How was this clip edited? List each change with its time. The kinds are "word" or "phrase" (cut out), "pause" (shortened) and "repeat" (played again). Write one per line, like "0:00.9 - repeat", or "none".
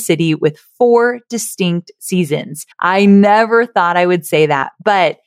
0:02.7 - pause